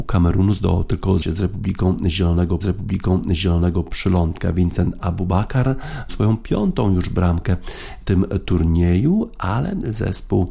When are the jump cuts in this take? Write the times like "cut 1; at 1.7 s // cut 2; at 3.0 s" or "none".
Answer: cut 1; at 1.2 s // cut 2; at 2.6 s // cut 3; at 6.1 s // cut 4; at 8.0 s